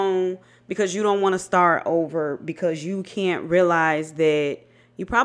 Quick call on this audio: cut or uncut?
uncut